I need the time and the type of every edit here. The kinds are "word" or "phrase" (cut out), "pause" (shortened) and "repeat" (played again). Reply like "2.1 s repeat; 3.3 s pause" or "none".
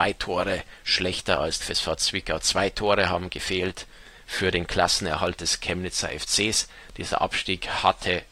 1.6 s word